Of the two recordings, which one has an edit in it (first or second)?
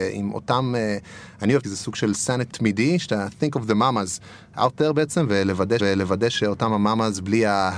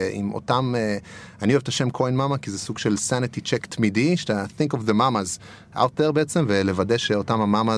first